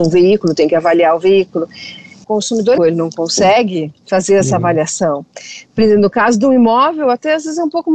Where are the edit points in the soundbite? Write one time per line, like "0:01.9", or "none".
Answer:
0:02.2
0:02.8
0:04.0